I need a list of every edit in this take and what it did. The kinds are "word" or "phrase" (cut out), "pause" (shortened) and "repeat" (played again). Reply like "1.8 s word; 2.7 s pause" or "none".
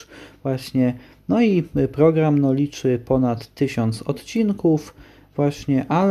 none